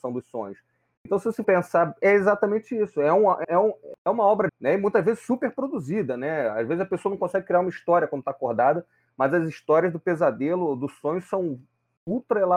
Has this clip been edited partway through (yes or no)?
yes